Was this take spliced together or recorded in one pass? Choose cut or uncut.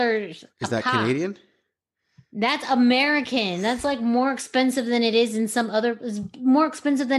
uncut